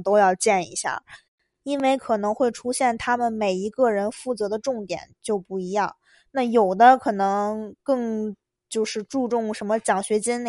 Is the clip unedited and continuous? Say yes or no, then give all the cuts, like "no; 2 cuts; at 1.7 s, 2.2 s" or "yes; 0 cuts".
yes; 0 cuts